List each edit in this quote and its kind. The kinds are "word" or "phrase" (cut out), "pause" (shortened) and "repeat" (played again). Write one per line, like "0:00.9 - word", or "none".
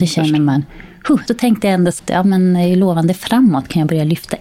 0:01.3 - word
0:02.0 - phrase